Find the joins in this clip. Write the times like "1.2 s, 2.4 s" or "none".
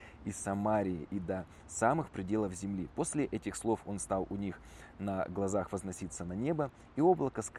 none